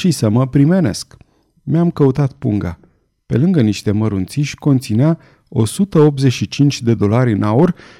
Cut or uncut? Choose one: uncut